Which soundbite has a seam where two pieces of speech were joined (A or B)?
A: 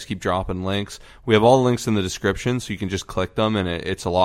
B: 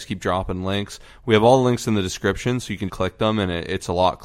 B